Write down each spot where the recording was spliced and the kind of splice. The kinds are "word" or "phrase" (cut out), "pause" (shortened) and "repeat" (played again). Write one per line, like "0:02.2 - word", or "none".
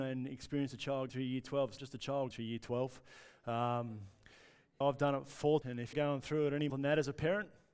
0:01.1 - word
0:01.8 - word
0:02.3 - word
0:04.8 - word
0:05.6 - word
0:05.9 - word
0:06.7 - word